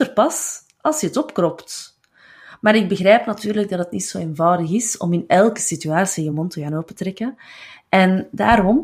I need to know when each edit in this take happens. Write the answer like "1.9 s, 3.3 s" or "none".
none